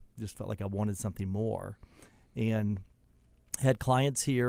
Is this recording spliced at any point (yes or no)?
no